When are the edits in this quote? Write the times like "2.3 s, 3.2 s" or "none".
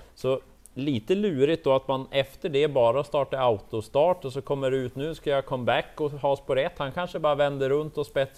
none